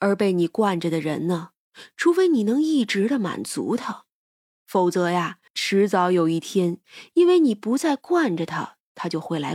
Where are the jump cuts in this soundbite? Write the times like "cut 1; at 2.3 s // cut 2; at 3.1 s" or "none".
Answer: cut 1; at 5.5 s

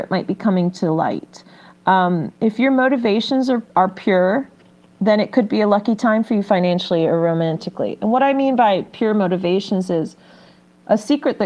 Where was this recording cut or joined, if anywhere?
cut 1; at 2.3 s // cut 2; at 3.7 s

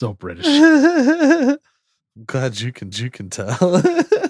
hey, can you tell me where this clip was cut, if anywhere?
cut 1; at 2.9 s

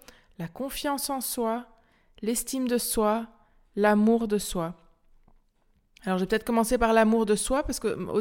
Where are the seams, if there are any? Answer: none

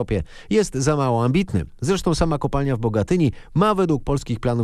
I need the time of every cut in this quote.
none

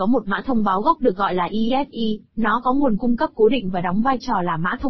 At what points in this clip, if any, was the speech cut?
cut 1; at 2.3 s

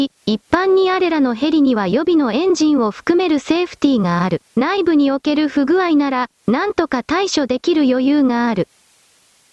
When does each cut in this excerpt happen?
cut 1; at 4.5 s

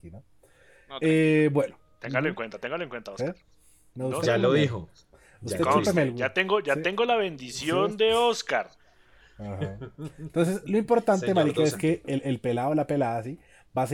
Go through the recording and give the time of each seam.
none

